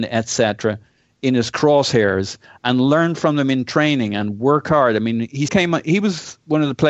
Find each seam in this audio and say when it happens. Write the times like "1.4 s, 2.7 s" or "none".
5.5 s